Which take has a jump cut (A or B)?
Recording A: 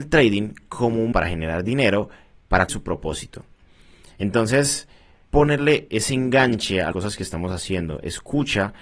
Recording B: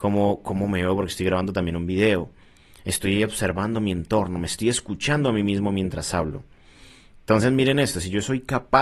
A